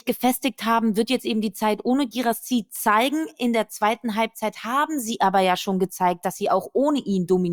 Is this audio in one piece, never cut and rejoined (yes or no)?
yes